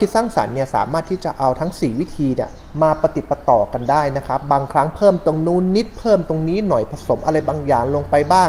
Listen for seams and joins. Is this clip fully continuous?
yes; 0 cuts

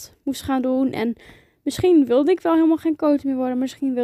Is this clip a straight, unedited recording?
yes; 0 cuts

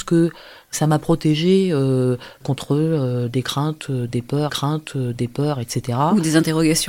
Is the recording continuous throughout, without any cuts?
no; 2 cuts; at 2.4 s, 4.5 s

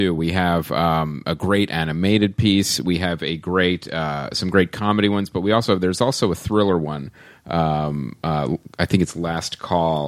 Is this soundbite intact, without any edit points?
yes; 0 cuts

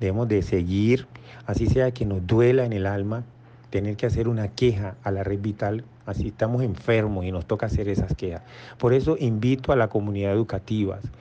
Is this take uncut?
yes; 0 cuts

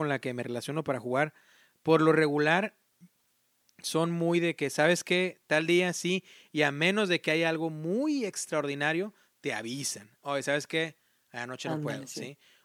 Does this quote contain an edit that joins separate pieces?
no; 0 cuts

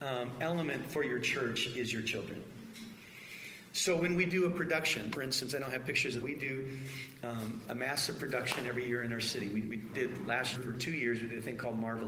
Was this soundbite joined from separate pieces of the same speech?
yes; 5 cuts; at 5.1 s, 6.2 s, 7.6 s, 9.9 s, 10.5 s

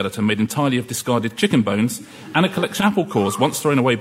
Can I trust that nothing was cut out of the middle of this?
no; 2 cuts; at 1.3 s, 2.8 s

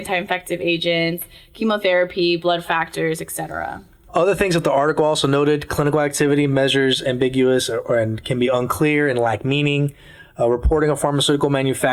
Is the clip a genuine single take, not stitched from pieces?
yes; 0 cuts

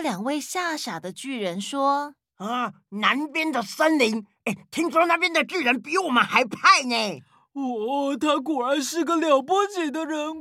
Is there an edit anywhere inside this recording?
no; 0 cuts

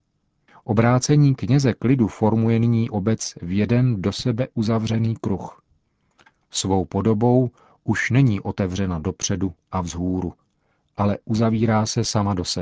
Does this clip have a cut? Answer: no; 0 cuts

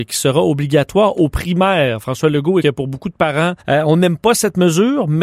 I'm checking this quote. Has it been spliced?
yes; 2 cuts; at 2.6 s, 3.6 s

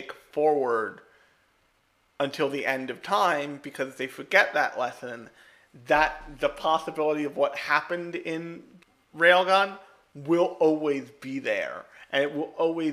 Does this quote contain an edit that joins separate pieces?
yes; 1 cut; at 8.8 s

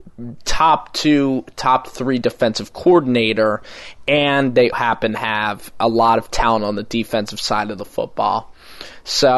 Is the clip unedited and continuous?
no; 1 cut; at 4.7 s

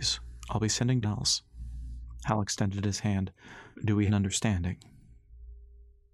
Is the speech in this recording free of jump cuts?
no; 3 cuts; at 1.0 s, 3.7 s, 4.1 s

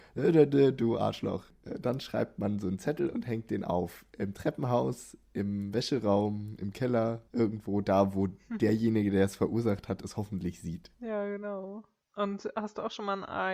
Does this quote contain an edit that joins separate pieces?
yes; 1 cut; at 7.3 s

